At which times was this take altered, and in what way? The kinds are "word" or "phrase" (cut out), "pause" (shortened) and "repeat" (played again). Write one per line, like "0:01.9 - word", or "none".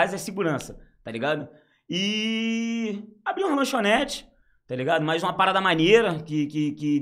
none